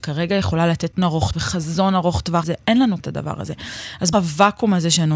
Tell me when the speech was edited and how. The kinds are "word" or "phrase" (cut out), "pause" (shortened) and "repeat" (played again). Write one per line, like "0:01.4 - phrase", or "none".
0:01.0 - word
0:01.3 - word
0:02.4 - word
0:03.0 - word
0:04.1 - word